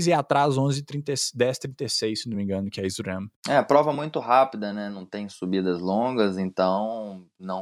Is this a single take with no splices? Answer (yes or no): yes